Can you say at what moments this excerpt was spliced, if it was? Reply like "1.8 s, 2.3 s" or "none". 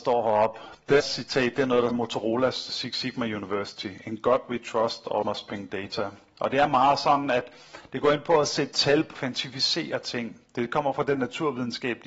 1.0 s, 1.9 s, 2.7 s, 5.2 s, 9.1 s, 11.1 s